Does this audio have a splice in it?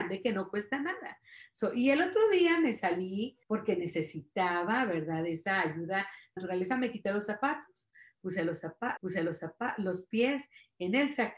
yes; 3 cuts; at 3.4 s, 6.4 s, 9.0 s

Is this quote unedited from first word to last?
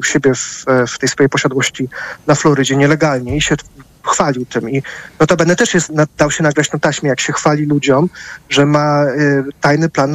no; 1 cut; at 5.9 s

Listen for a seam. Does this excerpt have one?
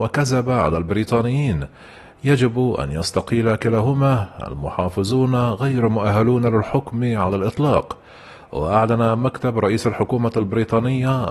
no; 0 cuts

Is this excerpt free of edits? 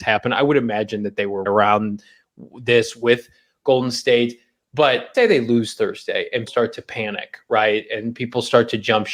no; 3 cuts; at 1.5 s, 5.1 s, 6.5 s

